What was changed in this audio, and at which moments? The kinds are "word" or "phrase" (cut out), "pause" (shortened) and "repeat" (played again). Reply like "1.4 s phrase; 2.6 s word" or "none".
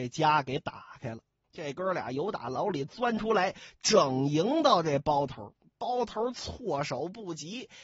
1.4 s pause